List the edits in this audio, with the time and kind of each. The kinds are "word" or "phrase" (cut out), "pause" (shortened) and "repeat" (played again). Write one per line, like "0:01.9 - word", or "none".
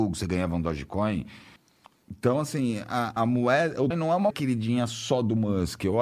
0:01.6 - pause
0:03.2 - word
0:03.9 - word
0:04.3 - word

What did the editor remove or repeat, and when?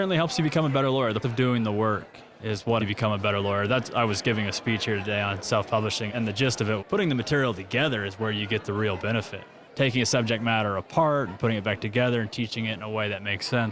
0:01.2 - word
0:02.8 - word
0:06.1 - word
0:06.8 - word

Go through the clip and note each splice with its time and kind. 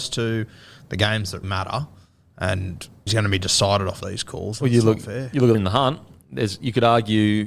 0:01.4 - word
0:03.1 - word
0:04.0 - phrase
0:05.5 - phrase

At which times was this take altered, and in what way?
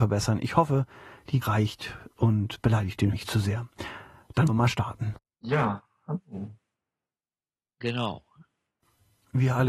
0:01.4 - word
0:02.5 - word
0:03.1 - word
0:04.5 - word

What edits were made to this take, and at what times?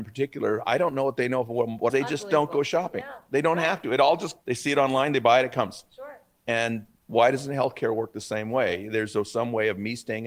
0:01.9 - phrase
0:04.4 - pause
0:06.9 - pause

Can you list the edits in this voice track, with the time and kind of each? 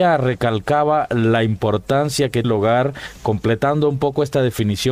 0:02.4 - word

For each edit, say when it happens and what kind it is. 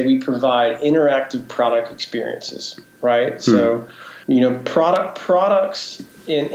0:04.2 - pause

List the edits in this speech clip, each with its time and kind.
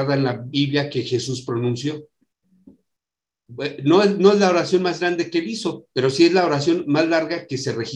0:05.9 - pause

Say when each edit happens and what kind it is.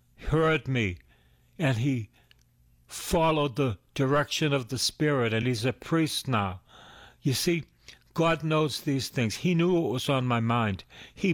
none

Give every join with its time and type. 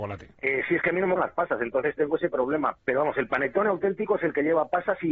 0:01.2 - word
0:02.8 - word

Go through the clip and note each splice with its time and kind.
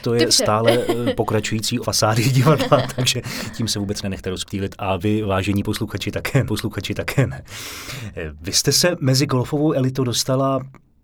0:01.8 - word
0:06.5 - repeat

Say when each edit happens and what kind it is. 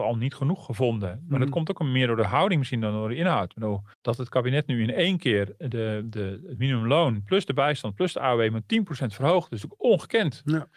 0:03.9 - pause

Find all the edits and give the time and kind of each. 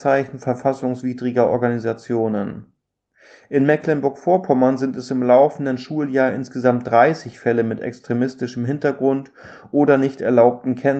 none

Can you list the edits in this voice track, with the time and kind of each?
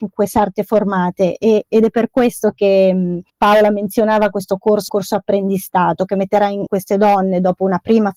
0:03.3 - pause
0:04.9 - phrase
0:06.7 - word

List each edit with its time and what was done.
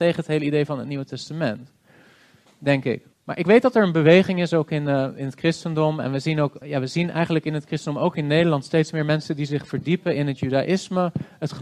0:03.1 - pause
0:06.6 - word

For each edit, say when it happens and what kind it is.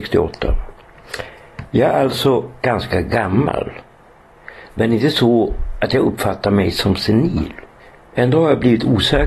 0:02.6 - pause
0:07.8 - pause

